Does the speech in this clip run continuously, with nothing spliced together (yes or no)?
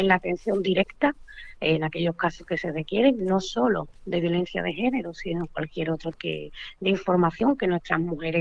no